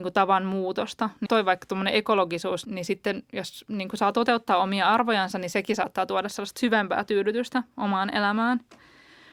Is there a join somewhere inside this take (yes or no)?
yes